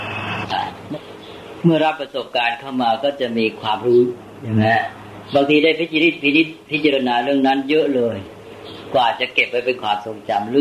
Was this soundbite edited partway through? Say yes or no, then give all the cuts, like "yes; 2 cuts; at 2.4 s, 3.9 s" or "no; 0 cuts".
no; 0 cuts